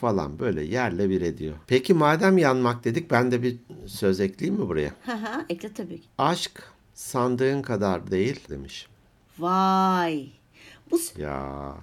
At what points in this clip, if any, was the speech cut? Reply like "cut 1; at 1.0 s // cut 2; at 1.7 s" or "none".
cut 1; at 1.6 s // cut 2; at 8.5 s